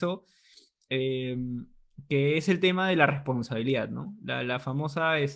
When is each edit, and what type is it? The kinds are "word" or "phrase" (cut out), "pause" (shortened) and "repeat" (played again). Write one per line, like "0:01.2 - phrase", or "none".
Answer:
none